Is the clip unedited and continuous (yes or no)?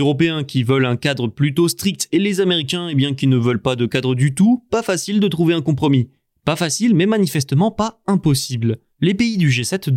yes